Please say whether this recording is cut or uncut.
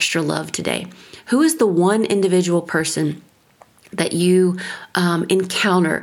uncut